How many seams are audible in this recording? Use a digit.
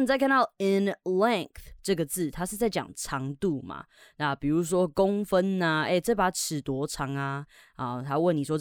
0